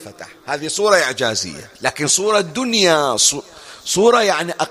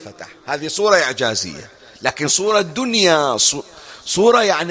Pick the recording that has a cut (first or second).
first